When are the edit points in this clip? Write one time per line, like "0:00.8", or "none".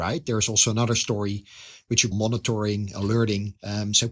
0:02.1